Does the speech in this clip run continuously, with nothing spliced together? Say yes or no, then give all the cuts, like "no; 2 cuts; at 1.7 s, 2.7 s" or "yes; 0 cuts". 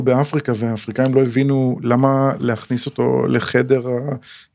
yes; 0 cuts